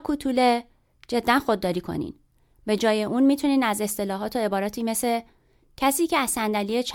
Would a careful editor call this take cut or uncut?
uncut